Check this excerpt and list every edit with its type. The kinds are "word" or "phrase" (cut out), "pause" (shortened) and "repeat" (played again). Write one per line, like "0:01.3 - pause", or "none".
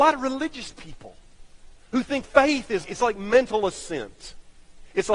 0:02.2 - word
0:02.8 - word